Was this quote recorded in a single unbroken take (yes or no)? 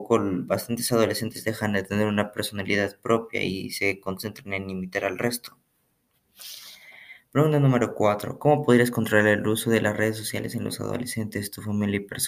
yes